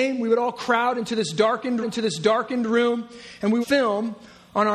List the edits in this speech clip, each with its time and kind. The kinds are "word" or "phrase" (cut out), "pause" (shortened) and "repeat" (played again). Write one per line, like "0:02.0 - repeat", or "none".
0:01.8 - repeat
0:03.6 - phrase